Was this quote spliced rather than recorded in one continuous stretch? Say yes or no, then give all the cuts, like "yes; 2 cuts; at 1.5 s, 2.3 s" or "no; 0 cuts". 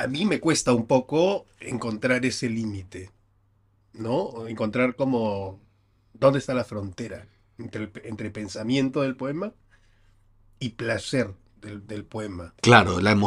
no; 0 cuts